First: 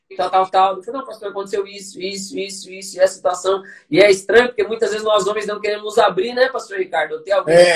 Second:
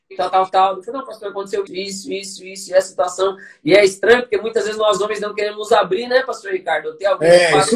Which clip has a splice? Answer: second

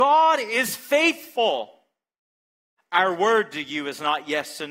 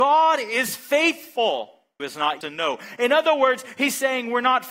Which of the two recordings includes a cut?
second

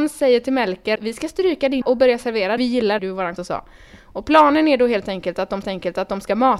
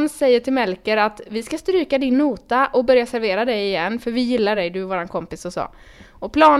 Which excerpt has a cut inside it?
first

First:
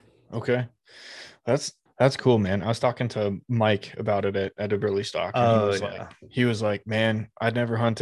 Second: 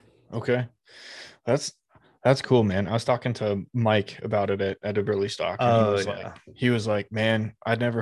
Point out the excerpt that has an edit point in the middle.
first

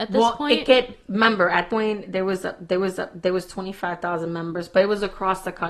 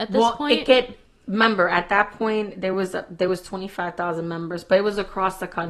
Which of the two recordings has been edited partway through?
first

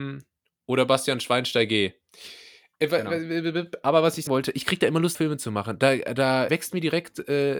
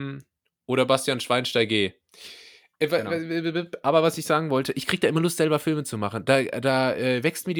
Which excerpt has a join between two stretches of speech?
first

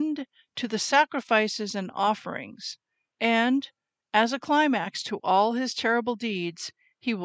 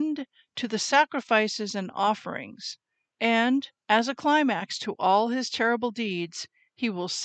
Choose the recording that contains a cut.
second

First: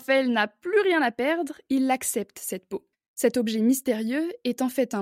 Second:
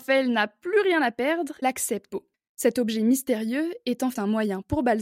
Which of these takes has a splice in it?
second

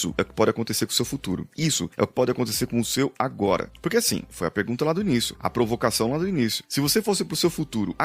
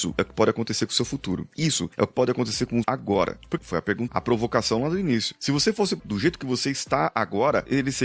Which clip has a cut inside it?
second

